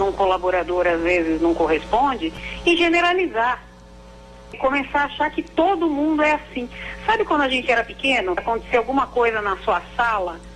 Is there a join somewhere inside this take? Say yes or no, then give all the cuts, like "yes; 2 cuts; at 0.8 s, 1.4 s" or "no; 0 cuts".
yes; 2 cuts; at 4.5 s, 8.4 s